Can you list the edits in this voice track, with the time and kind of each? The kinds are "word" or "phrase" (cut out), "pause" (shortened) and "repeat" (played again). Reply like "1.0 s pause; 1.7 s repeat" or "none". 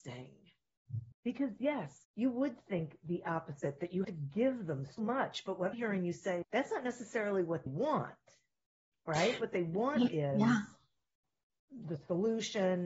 1.1 s pause; 2.0 s pause; 4.0 s word; 5.0 s word; 5.7 s word; 6.4 s word; 7.7 s word